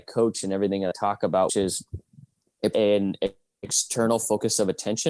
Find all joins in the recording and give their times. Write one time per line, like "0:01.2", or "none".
0:00.9
0:01.5
0:02.7